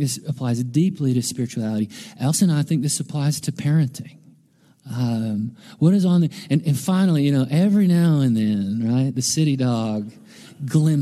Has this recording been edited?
no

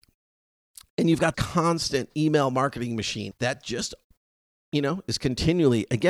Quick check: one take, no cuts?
no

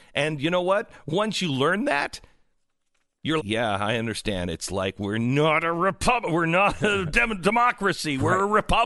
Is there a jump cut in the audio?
yes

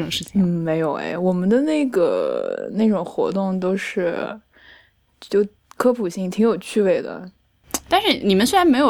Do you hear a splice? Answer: no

